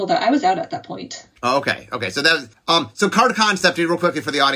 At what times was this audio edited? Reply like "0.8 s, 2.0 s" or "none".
1.3 s, 2.5 s